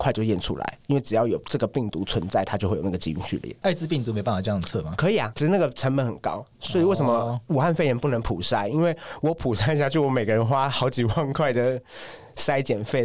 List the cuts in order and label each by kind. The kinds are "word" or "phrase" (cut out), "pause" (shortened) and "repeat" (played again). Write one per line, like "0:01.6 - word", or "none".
0:06.5 - pause